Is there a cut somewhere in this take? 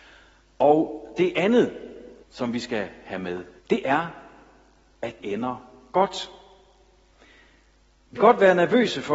yes; 4 cuts; at 2.2 s, 3.6 s, 5.2 s, 8.2 s

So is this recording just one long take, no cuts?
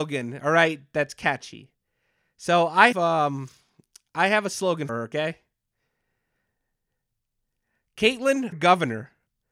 no; 3 cuts; at 2.9 s, 4.9 s, 8.5 s

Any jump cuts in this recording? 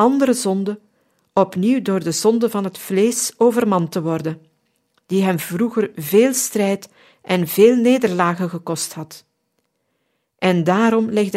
no; 0 cuts

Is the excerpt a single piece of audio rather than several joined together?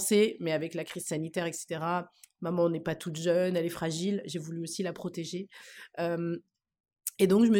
yes; 0 cuts

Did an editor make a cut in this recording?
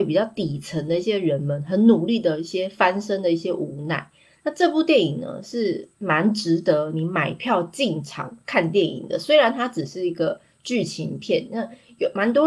no; 0 cuts

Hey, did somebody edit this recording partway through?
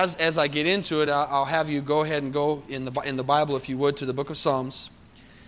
no; 0 cuts

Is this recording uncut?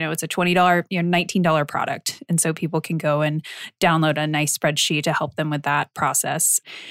yes; 0 cuts

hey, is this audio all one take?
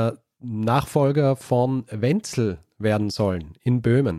yes; 0 cuts

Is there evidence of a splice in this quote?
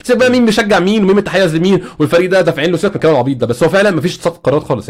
no; 0 cuts

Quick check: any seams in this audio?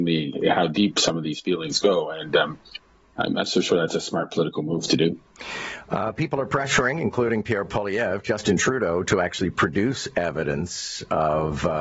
no; 0 cuts

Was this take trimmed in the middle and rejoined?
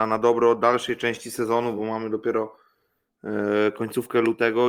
no; 0 cuts

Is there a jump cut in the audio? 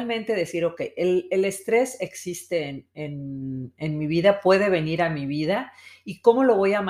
no; 0 cuts

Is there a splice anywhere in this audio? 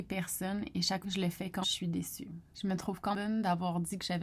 yes; 4 cuts; at 1.0 s, 1.6 s, 2.5 s, 3.1 s

